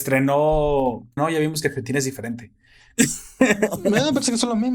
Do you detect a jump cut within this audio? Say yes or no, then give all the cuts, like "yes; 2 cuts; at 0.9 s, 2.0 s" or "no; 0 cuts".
yes; 1 cut; at 1.2 s